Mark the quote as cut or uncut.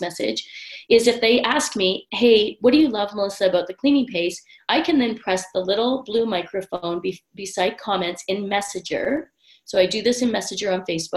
uncut